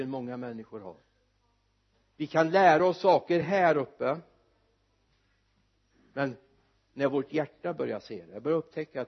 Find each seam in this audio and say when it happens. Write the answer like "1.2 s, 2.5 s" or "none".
none